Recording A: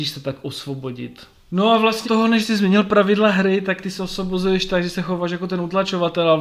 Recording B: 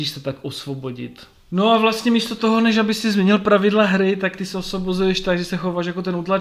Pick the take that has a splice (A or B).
A